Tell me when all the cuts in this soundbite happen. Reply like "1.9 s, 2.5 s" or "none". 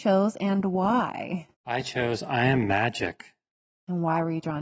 1.5 s